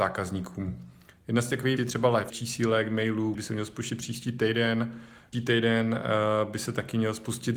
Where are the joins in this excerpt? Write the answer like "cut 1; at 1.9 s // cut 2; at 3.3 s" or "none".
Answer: cut 1; at 1.8 s // cut 2; at 2.3 s // cut 3; at 3.3 s // cut 4; at 5.3 s